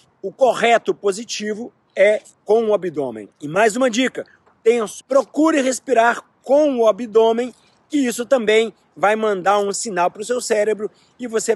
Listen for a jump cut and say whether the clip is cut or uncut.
cut